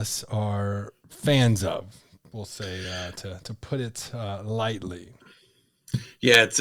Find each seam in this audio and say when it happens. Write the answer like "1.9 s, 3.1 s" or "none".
none